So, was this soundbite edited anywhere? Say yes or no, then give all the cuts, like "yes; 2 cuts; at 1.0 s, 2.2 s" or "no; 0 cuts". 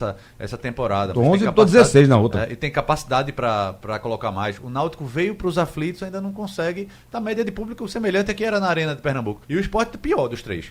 yes; 1 cut; at 9.4 s